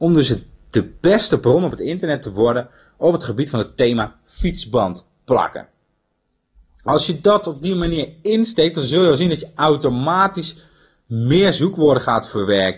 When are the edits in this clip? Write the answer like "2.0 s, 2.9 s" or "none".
none